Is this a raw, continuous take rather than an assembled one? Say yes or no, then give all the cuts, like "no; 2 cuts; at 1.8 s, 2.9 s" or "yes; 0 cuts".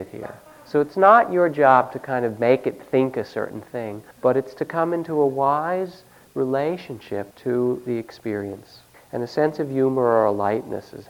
no; 3 cuts; at 4.1 s, 7.3 s, 8.9 s